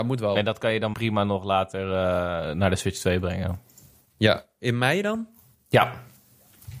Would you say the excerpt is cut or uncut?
cut